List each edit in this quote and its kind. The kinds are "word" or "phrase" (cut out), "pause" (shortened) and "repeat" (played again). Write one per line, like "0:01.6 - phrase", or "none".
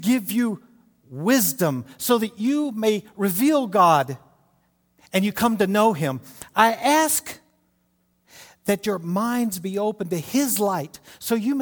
none